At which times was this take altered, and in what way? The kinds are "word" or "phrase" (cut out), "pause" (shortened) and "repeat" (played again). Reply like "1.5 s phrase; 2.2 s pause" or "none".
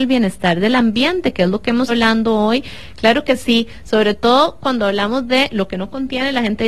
1.9 s word